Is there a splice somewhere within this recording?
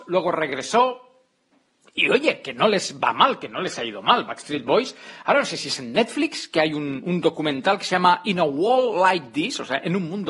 no; 0 cuts

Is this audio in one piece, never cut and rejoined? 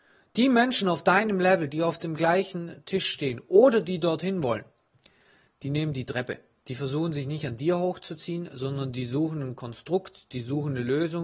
yes; 0 cuts

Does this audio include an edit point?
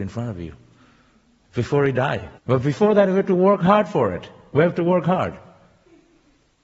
yes; 1 cut; at 2.4 s

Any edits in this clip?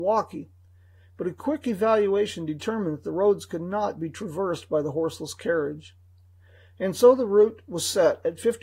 no; 0 cuts

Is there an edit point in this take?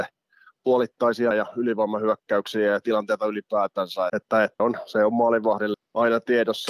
yes; 4 cuts; at 1.3 s, 4.1 s, 4.6 s, 5.7 s

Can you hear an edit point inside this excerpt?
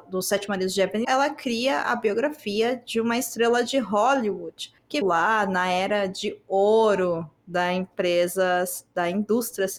yes; 2 cuts; at 1.0 s, 5.0 s

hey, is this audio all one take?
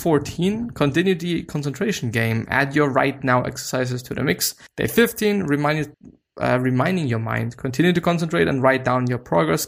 no; 2 cuts; at 4.7 s, 5.9 s

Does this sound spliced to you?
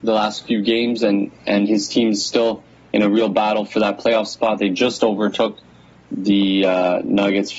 no; 0 cuts

